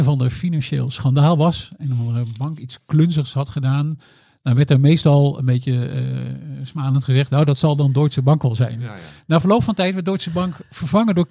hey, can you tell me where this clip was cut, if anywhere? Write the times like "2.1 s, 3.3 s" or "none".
none